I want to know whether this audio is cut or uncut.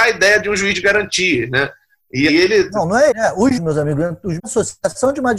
cut